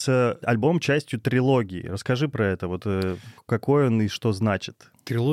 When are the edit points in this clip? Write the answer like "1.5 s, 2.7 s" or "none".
none